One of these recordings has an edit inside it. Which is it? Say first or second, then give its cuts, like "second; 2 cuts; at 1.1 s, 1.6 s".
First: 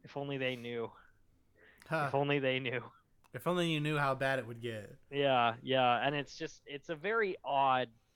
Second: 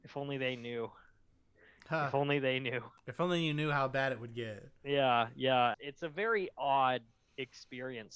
second; 2 cuts; at 3.0 s, 5.7 s